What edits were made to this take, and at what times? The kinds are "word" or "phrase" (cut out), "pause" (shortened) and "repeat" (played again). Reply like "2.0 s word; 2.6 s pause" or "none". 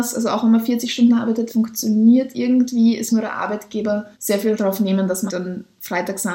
1.5 s word; 3.1 s word; 4.1 s pause; 4.6 s word; 5.3 s word

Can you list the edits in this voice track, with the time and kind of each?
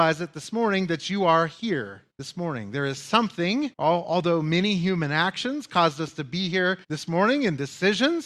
2.1 s pause; 3.7 s pause; 6.8 s pause

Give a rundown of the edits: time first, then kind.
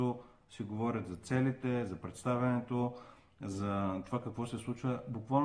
none

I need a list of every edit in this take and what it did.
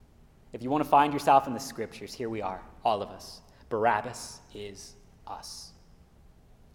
none

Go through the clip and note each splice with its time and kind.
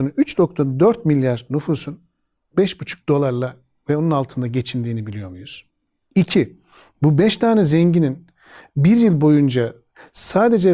none

